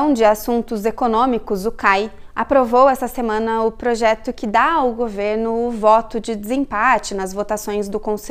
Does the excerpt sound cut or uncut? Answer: uncut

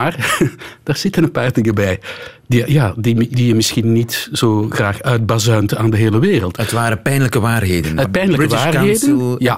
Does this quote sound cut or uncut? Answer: cut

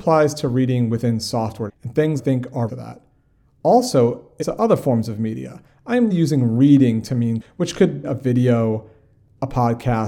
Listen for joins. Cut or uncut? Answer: cut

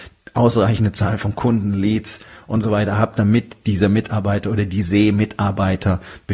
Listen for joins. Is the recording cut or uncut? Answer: uncut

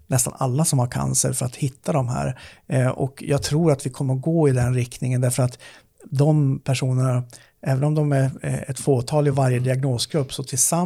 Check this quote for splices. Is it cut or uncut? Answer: uncut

